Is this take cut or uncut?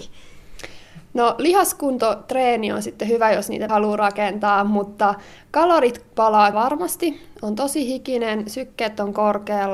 cut